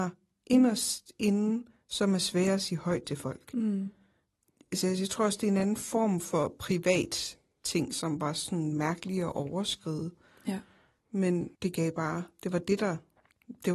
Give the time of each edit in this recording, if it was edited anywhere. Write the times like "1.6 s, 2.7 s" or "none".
11.5 s